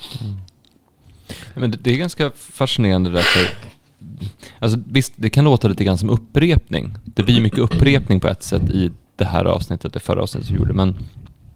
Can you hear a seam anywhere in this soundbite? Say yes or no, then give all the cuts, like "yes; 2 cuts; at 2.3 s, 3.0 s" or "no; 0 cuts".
no; 0 cuts